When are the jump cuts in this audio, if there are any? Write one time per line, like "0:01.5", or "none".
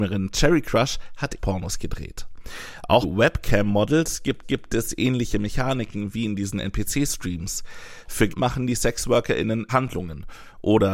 0:01.4
0:03.0
0:04.4
0:08.3
0:09.7